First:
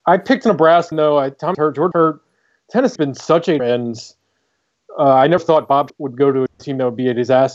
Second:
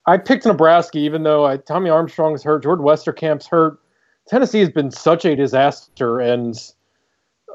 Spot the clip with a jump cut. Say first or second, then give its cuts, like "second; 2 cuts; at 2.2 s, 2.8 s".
first; 8 cuts; at 0.9 s, 1.5 s, 1.9 s, 3.0 s, 3.6 s, 5.4 s, 5.9 s, 6.5 s